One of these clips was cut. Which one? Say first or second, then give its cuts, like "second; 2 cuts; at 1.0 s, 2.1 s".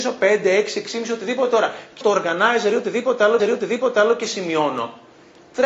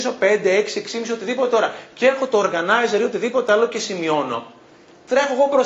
first; 2 cuts; at 2.0 s, 3.4 s